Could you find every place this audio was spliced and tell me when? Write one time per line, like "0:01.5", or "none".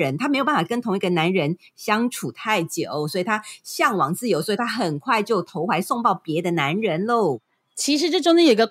none